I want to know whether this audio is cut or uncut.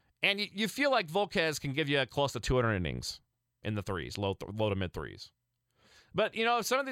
uncut